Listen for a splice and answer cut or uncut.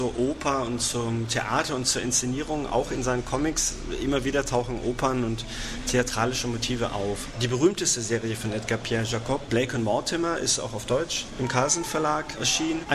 uncut